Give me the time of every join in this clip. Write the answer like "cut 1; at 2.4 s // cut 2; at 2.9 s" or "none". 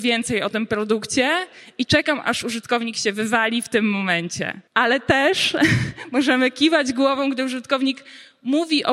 cut 1; at 4.7 s